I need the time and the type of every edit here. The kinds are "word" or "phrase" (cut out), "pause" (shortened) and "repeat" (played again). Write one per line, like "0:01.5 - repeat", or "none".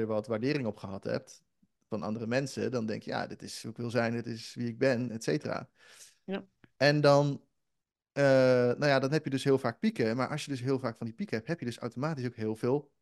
none